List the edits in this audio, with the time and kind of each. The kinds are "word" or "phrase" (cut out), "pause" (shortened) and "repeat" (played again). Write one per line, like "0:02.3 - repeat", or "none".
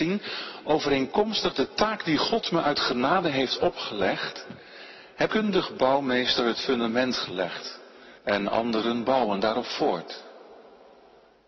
0:05.3 - phrase
0:08.2 - pause